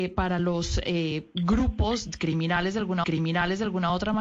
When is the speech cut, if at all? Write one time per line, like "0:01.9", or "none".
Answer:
0:03.0